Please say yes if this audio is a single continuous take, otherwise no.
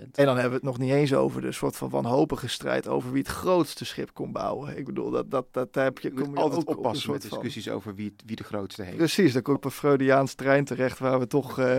no